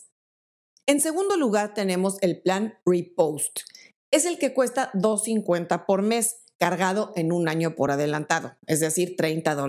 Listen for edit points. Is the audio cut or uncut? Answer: uncut